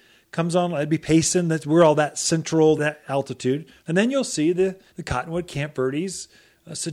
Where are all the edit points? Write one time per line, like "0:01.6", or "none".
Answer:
0:02.8
0:03.8
0:04.9